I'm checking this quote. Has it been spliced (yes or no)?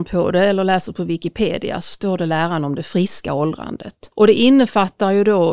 yes